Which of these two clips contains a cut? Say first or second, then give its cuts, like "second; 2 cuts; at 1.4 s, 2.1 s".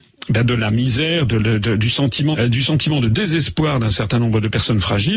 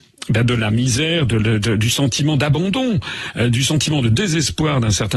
first; 1 cut; at 2.3 s